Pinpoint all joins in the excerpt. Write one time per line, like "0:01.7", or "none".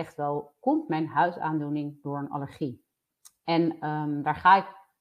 0:03.0